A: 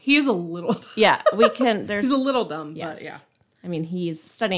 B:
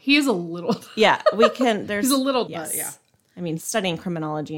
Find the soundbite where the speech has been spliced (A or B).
B